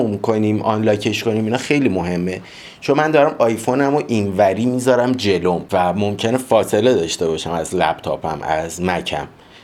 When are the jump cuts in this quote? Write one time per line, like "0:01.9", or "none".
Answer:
none